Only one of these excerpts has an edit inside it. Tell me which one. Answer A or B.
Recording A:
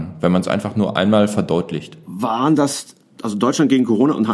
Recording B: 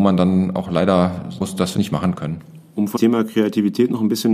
B